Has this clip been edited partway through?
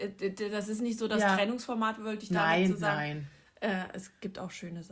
no; 0 cuts

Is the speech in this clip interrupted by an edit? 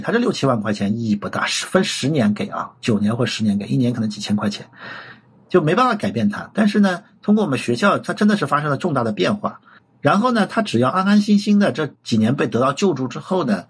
no; 0 cuts

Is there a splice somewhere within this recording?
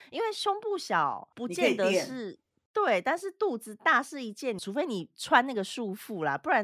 yes; 1 cut; at 4.6 s

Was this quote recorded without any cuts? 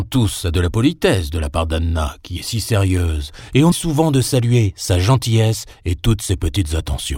no; 1 cut; at 3.7 s

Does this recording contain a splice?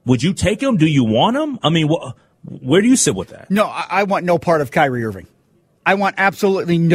no; 0 cuts

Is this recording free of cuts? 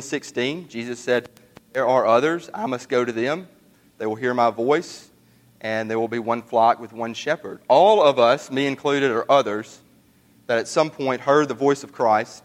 yes; 0 cuts

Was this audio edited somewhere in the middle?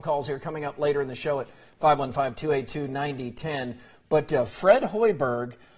no; 0 cuts

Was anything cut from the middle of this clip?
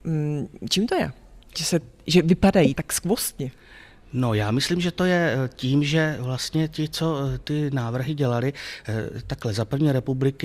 yes; 2 cuts; at 1.5 s, 2.7 s

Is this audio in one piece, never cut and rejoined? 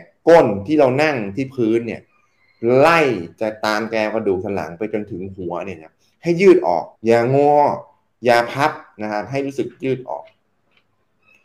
no; 1 cut; at 6.9 s

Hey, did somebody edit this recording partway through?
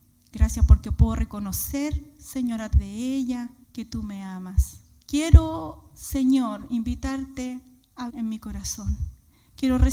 yes; 4 cuts; at 2.7 s, 3.6 s, 5.0 s, 8.1 s

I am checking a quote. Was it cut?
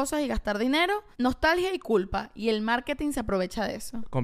yes; 1 cut; at 1.1 s

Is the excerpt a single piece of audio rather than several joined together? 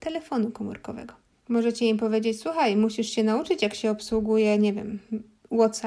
yes; 0 cuts

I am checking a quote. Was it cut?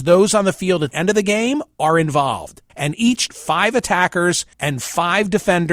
yes; 4 cuts; at 0.9 s, 2.7 s, 3.3 s, 4.5 s

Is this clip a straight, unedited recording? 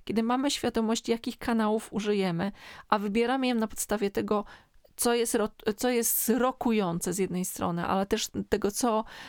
yes; 0 cuts

